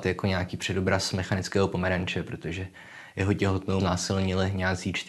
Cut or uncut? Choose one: cut